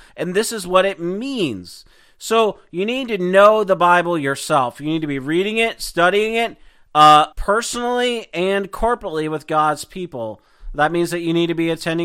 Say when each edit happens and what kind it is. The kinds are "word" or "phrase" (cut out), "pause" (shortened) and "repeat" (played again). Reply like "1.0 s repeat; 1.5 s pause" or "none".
7.3 s pause